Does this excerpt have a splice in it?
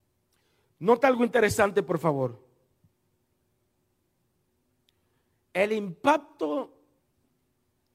no; 0 cuts

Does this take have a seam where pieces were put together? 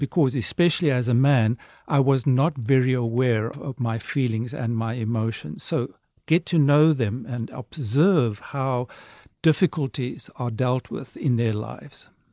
yes; 1 cut; at 3.5 s

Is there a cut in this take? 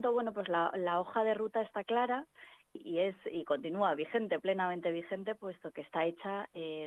yes; 1 cut; at 2.6 s

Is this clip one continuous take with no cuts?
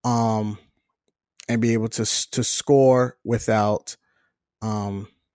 yes; 0 cuts

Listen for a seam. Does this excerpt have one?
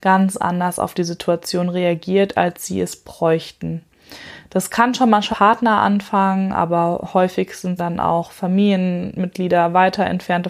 yes; 2 cuts; at 5.3 s, 7.8 s

